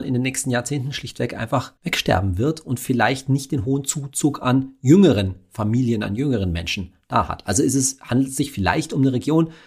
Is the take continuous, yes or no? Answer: no